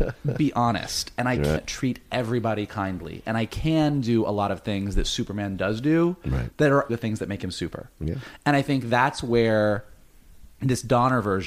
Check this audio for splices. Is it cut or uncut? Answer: cut